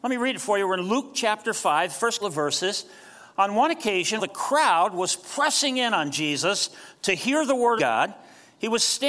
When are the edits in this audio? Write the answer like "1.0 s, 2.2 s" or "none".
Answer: 2.2 s, 4.2 s, 7.8 s